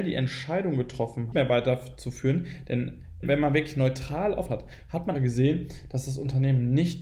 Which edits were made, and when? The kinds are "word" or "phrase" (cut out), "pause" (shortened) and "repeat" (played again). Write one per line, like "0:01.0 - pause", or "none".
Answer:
0:01.3 - phrase
0:03.2 - word
0:04.5 - phrase
0:05.1 - word